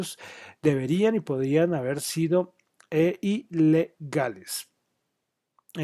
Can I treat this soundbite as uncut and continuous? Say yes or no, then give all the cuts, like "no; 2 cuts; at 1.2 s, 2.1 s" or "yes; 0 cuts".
yes; 0 cuts